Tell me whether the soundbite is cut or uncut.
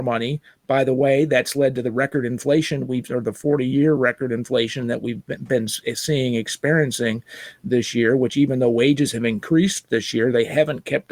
uncut